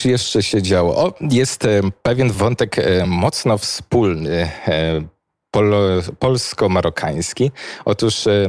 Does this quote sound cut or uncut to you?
uncut